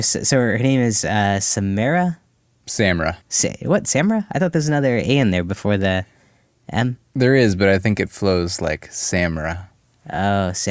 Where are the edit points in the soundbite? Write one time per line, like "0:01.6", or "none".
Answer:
0:03.2
0:07.0

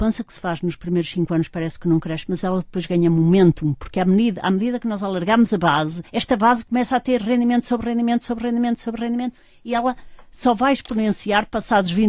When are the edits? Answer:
0:06.1

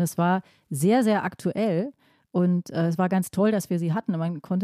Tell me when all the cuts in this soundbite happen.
none

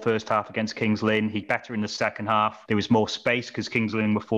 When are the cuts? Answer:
0:01.4
0:02.7

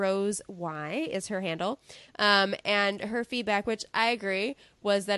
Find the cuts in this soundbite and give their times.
none

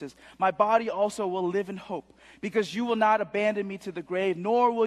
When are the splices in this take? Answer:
none

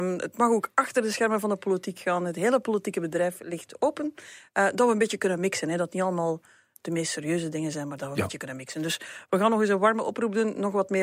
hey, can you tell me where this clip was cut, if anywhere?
none

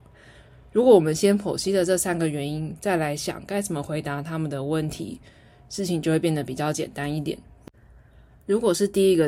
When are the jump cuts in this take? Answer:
none

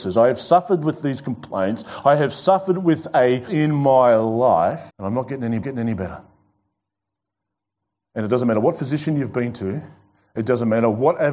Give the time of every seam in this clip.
0:03.5
0:04.9
0:05.6

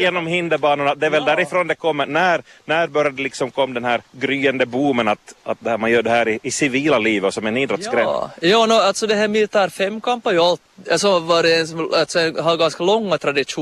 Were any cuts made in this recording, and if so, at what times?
0:04.1

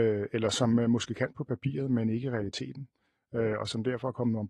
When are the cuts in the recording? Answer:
none

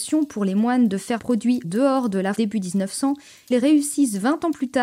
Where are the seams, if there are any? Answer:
0:01.2
0:01.6
0:02.3
0:03.5

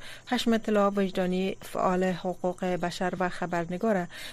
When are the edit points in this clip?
none

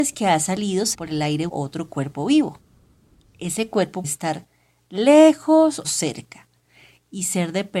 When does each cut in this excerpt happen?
0:00.9
0:01.5
0:04.0
0:05.8

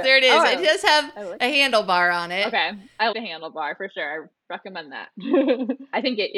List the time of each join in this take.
0:03.1

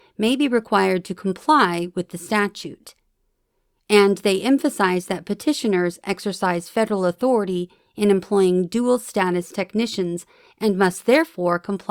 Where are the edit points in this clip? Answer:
none

